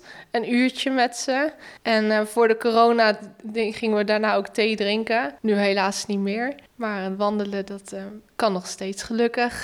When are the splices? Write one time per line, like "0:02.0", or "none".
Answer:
0:01.8
0:05.4
0:06.7